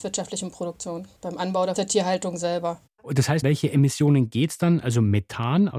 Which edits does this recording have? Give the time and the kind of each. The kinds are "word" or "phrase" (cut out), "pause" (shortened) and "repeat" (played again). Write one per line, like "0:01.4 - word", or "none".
0:01.2 - pause
0:01.8 - phrase
0:03.4 - word